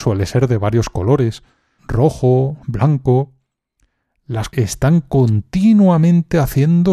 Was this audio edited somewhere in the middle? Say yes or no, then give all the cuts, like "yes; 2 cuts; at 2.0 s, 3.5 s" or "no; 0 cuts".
yes; 3 cuts; at 1.8 s, 2.6 s, 4.5 s